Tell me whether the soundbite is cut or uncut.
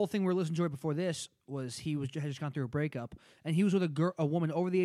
uncut